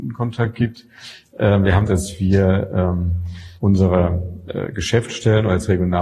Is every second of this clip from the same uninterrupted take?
no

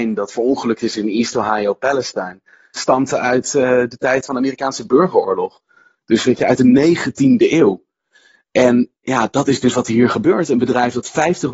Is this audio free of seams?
no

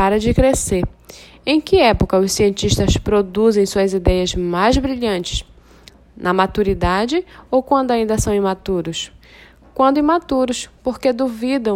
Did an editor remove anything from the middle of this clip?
no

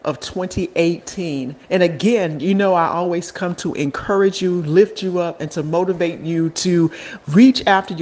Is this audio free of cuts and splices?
no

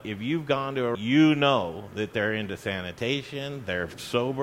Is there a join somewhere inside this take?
yes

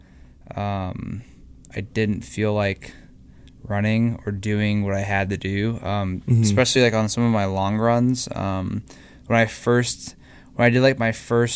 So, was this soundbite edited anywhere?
no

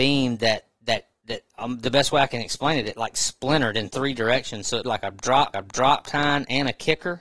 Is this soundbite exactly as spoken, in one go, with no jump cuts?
no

